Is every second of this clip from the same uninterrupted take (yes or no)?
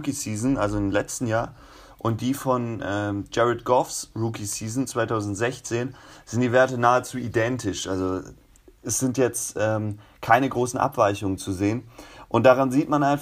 yes